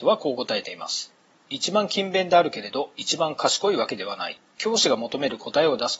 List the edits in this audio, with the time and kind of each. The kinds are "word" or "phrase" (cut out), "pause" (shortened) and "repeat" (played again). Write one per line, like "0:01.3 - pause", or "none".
0:04.5 - pause

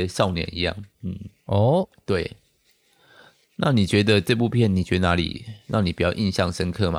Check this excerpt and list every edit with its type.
0:00.9 - pause

